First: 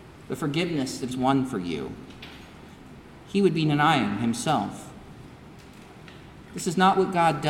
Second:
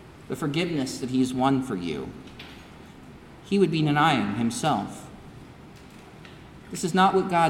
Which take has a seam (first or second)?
first